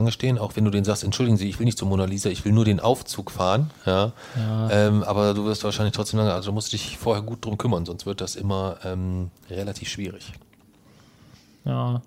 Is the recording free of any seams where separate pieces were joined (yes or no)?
yes